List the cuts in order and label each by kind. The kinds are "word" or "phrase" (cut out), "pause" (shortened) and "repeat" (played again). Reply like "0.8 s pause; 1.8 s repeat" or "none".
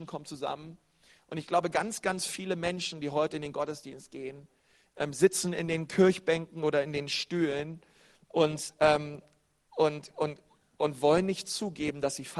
none